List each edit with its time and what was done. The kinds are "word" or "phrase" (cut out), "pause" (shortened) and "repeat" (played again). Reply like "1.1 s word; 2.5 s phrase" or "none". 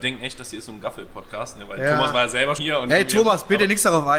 2.6 s word